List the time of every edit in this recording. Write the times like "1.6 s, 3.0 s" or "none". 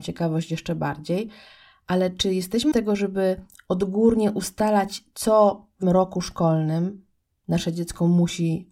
2.7 s, 5.8 s